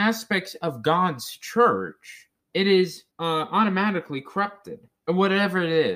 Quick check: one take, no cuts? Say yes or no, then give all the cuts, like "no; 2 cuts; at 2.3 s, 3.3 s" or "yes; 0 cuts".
no; 3 cuts; at 2.4 s, 3.1 s, 5.0 s